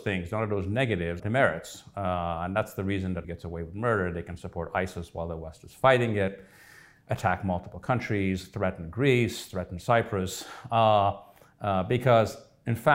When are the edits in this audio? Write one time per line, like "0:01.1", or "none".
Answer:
0:01.2
0:03.2